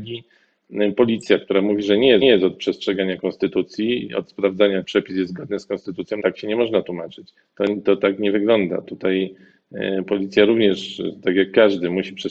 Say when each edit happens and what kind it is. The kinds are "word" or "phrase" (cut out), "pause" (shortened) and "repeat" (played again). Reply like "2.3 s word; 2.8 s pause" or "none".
2.2 s repeat; 4.8 s word; 6.2 s word; 7.4 s pause

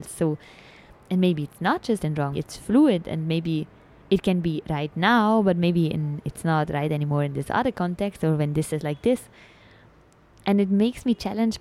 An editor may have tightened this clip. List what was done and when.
2.0 s word; 2.3 s word; 8.7 s word

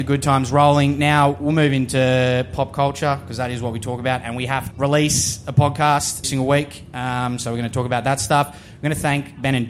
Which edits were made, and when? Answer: 4.7 s word; 6.2 s word

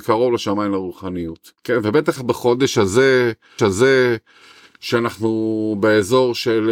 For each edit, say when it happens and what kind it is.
1.6 s pause; 2.2 s word; 3.6 s repeat

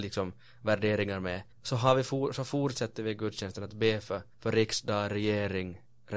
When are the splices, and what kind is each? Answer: 1.5 s pause; 4.3 s pause

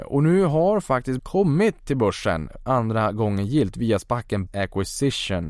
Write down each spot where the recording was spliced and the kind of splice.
1.2 s word; 4.5 s word

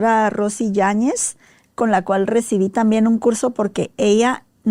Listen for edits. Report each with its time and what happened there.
none

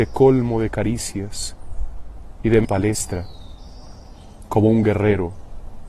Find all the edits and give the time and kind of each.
2.6 s phrase

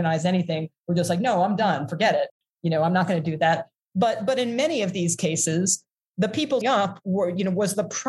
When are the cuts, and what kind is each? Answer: 6.6 s word

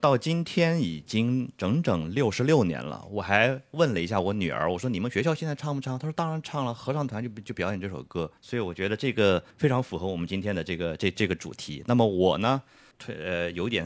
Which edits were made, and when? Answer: 8.4 s pause; 9.5 s pause; 12.9 s word

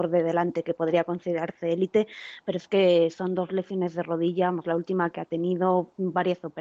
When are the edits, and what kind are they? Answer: none

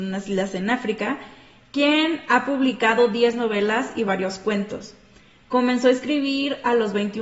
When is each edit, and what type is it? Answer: none

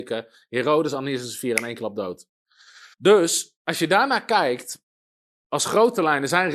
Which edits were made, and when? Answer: 2.9 s pause

